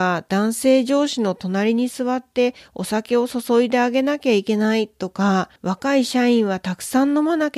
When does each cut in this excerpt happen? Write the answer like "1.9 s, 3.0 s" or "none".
5.6 s